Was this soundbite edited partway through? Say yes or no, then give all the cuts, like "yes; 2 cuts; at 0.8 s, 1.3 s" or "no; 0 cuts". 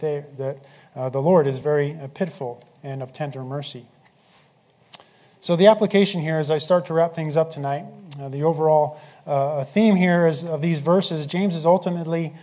no; 0 cuts